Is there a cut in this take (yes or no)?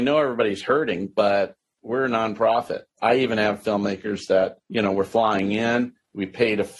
no